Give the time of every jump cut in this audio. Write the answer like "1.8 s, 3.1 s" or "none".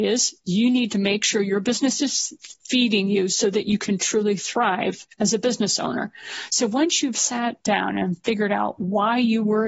2.6 s